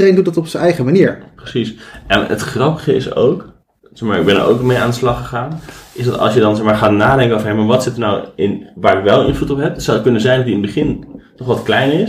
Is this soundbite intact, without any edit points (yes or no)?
yes